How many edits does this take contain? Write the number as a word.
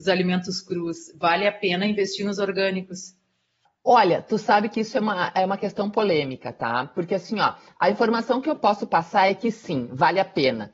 one